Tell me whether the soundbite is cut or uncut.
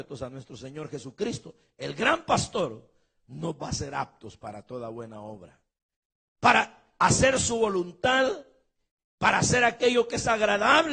uncut